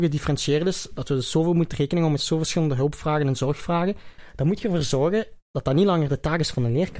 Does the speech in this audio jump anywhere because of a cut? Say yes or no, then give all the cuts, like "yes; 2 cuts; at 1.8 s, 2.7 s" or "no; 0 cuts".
no; 0 cuts